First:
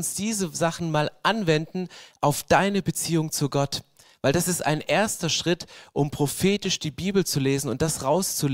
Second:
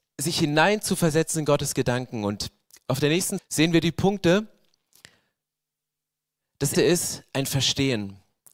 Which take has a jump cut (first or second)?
second